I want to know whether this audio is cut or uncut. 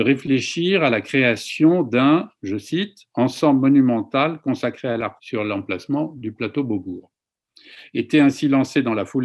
cut